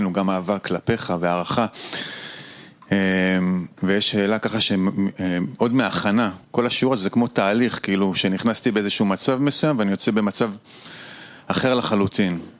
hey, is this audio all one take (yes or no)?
no